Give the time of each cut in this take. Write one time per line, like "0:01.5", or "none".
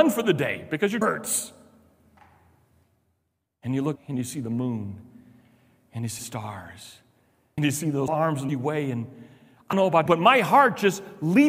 0:01.0
0:04.0
0:06.2
0:07.6
0:08.1
0:08.5
0:09.7
0:10.1